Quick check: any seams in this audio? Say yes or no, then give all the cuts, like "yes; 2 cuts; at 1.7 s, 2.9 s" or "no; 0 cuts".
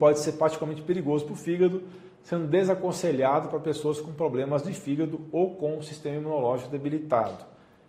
no; 0 cuts